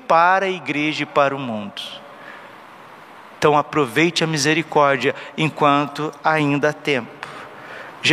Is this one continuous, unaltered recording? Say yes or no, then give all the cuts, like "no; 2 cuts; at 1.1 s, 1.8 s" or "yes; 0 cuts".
yes; 0 cuts